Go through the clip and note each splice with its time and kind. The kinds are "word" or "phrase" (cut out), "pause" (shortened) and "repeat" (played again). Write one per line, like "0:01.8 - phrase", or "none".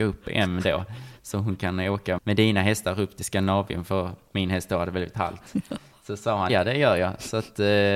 0:02.2 - word
0:06.5 - word

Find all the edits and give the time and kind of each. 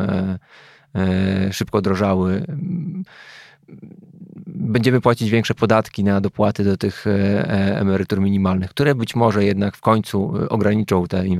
none

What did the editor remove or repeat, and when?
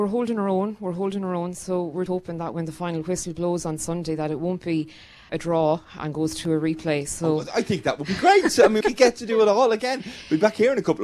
0:02.1 - word
0:05.3 - word
0:06.0 - word
0:08.8 - word

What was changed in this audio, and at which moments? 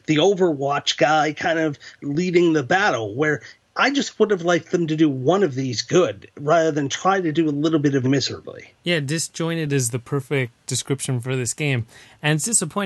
0:03.6 - pause
0:08.0 - phrase
0:08.8 - pause

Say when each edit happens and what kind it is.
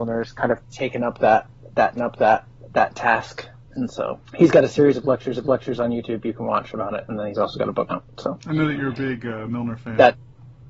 0:02.0 - repeat
0:04.3 - pause
0:05.4 - repeat
0:07.9 - word

